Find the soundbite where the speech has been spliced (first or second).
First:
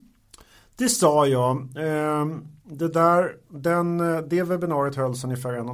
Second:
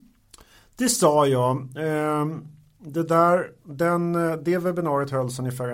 first